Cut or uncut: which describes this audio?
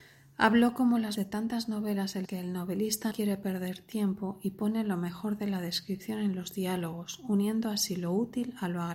cut